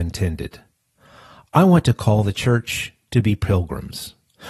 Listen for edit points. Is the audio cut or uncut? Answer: uncut